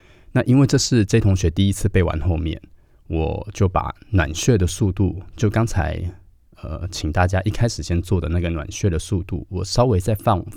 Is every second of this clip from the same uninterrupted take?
yes; 0 cuts

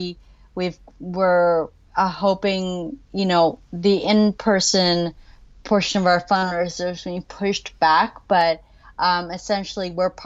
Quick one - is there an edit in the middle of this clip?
no; 0 cuts

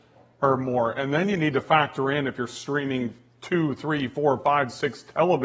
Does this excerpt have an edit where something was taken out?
no; 0 cuts

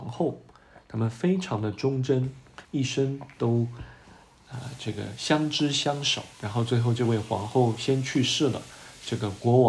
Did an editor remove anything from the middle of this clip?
yes; 2 cuts; at 2.6 s, 6.3 s

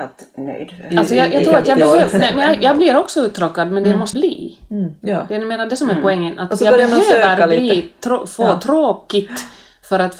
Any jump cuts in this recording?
yes; 1 cut; at 4.1 s

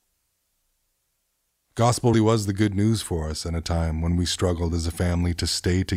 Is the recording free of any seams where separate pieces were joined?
no; 1 cut; at 2.1 s

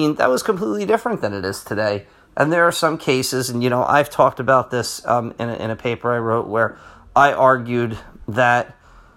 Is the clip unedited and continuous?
yes; 0 cuts

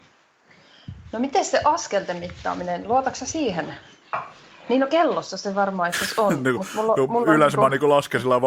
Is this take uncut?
yes; 0 cuts

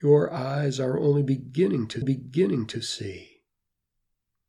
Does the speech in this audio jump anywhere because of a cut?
yes; 1 cut; at 2.0 s

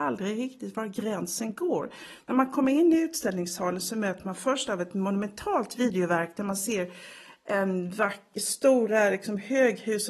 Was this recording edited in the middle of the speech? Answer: no; 0 cuts

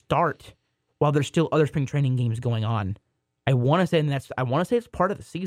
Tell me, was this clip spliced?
no; 0 cuts

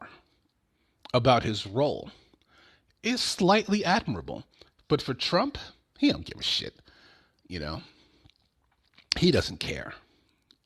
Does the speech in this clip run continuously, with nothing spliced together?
yes; 0 cuts

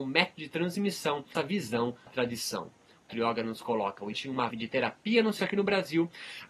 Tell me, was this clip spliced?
yes; 6 cuts; at 1.3 s, 2.1 s, 3.1 s, 4.1 s, 4.5 s, 5.4 s

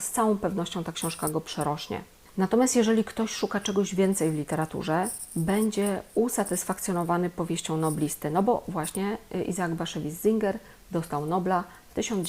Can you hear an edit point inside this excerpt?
no; 0 cuts

